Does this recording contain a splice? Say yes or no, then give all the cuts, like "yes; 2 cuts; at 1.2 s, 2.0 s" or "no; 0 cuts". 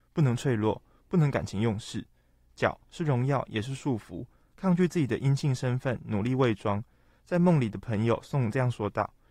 no; 0 cuts